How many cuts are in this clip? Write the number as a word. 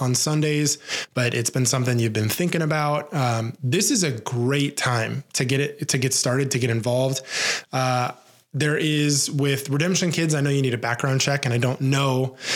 zero